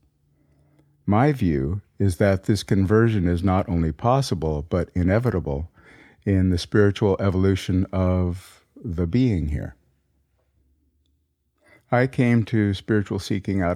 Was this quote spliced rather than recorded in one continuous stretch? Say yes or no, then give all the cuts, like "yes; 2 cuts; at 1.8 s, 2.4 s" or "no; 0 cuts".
no; 0 cuts